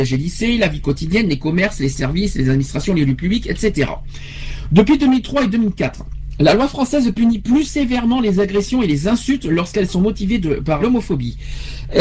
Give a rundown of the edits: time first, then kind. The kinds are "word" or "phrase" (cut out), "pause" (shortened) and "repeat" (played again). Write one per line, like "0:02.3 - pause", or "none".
0:10.8 - word